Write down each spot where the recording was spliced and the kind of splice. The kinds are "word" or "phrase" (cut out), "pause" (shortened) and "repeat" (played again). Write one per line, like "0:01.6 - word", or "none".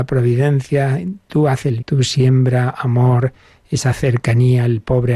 0:01.8 - word

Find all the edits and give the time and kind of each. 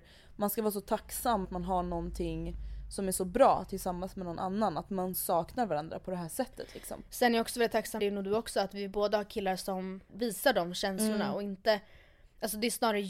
0:01.4 - word
0:08.0 - word
0:10.1 - word

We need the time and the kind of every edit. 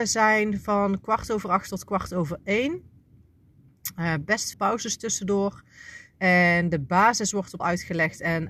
0:04.5 - word
0:07.6 - word

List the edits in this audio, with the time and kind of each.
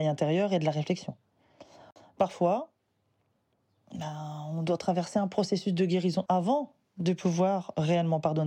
0:06.3 - word

